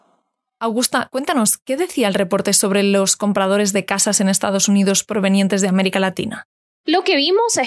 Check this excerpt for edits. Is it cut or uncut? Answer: uncut